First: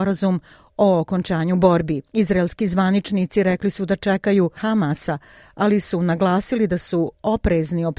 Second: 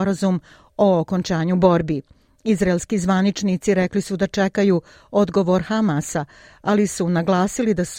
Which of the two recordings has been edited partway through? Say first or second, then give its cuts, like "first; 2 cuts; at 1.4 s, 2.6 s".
first; 2 cuts; at 2.1 s, 4.6 s